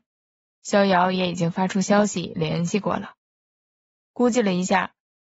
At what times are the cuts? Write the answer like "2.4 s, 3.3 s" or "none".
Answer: none